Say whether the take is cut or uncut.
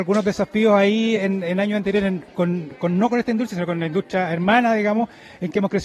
uncut